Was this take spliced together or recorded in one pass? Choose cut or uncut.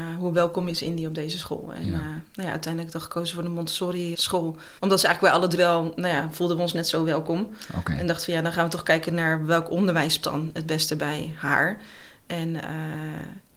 cut